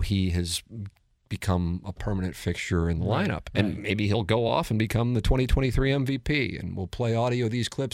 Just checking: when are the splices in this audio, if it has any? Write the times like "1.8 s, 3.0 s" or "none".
none

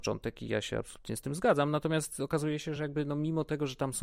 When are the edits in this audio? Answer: none

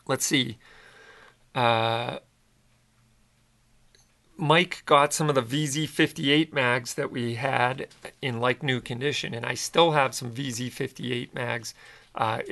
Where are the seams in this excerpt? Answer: none

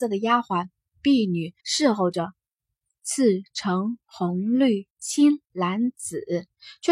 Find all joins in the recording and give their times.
1.6 s

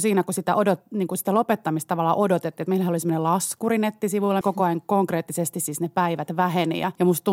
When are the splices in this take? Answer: 4.4 s

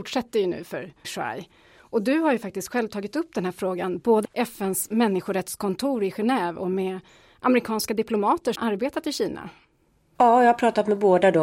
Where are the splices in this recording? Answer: 1.0 s, 4.2 s, 8.6 s

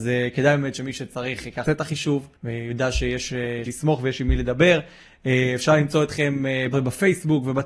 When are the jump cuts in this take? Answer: 1.6 s, 2.4 s, 3.7 s, 6.7 s

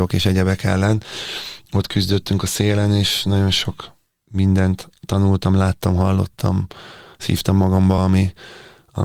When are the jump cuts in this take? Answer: none

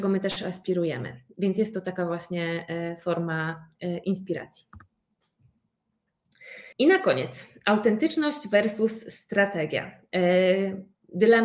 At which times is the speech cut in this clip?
6.7 s

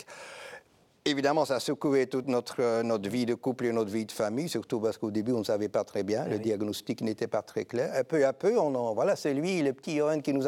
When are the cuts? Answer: none

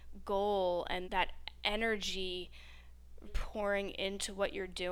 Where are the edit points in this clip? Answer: 1.0 s, 3.3 s

